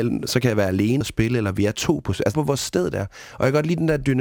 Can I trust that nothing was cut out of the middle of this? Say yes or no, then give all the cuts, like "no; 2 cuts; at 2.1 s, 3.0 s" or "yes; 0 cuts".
no; 2 cuts; at 1.0 s, 2.3 s